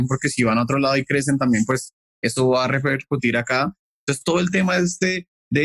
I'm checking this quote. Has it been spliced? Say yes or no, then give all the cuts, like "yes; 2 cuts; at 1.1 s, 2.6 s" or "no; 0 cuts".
no; 0 cuts